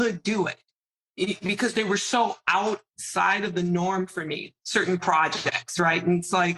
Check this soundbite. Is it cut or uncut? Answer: uncut